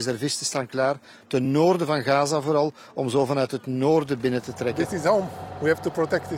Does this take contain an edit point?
no; 0 cuts

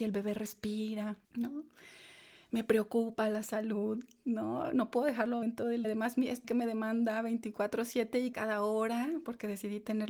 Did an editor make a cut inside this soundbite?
yes; 5 cuts; at 1.2 s, 5.4 s, 5.8 s, 6.4 s, 8.3 s

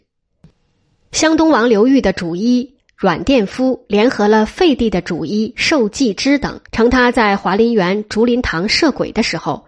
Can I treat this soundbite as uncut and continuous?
no; 1 cut; at 6.6 s

